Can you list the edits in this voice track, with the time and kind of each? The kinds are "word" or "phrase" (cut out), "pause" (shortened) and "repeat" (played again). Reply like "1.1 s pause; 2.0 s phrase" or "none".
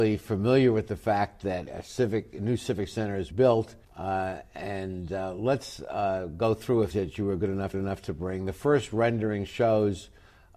1.7 s word; 3.3 s word; 3.8 s pause; 6.9 s phrase; 7.7 s repeat